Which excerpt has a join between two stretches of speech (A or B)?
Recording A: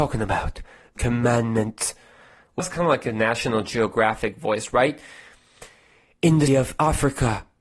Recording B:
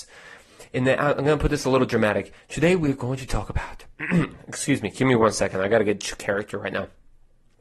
A